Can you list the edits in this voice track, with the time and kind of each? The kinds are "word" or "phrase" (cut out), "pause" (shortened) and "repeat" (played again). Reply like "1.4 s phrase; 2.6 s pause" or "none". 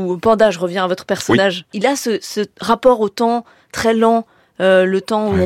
none